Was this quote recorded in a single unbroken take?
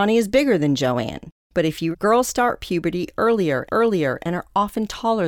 no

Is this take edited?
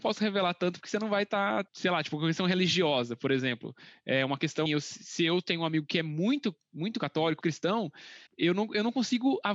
yes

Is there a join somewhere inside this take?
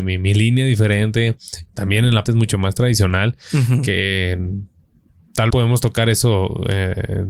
yes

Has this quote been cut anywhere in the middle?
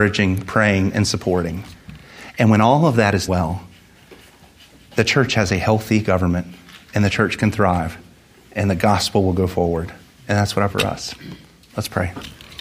yes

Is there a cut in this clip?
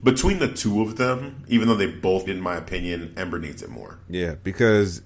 yes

